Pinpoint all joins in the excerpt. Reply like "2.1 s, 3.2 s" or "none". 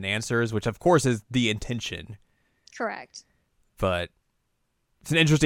none